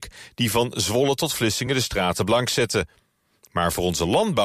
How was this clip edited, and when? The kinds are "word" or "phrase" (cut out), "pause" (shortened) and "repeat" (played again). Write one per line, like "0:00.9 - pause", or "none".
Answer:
none